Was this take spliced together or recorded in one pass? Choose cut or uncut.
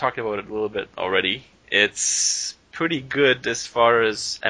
uncut